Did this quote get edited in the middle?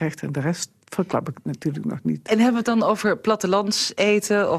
no; 0 cuts

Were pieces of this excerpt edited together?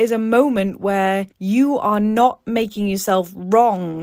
yes; 1 cut; at 1.3 s

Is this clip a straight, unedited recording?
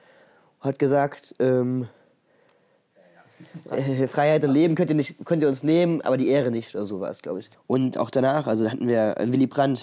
no; 1 cut; at 7.5 s

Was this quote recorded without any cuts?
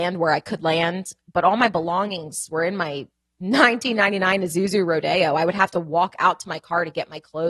yes; 0 cuts

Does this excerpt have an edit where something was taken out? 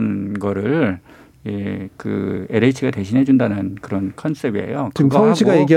no; 0 cuts

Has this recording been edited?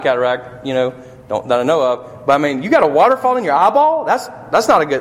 no; 0 cuts

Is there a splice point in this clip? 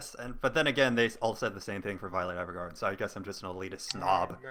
no; 0 cuts

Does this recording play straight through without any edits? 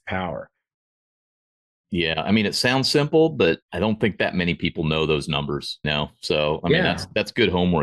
no; 2 cuts; at 3.6 s, 5.8 s

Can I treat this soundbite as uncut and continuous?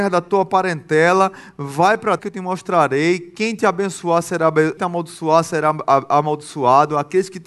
no; 2 cuts; at 2.2 s, 4.8 s

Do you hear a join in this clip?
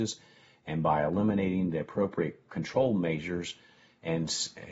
no; 0 cuts

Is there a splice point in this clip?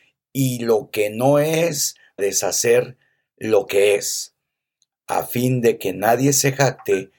yes; 1 cut; at 2.2 s

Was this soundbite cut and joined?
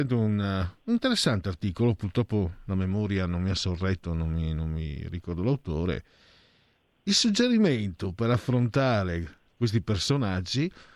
no; 0 cuts

